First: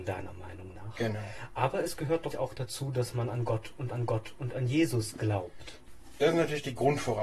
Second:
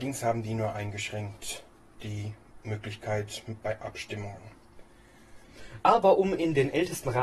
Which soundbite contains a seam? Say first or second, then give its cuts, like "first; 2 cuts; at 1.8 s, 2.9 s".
first; 2 cuts; at 2.3 s, 3.9 s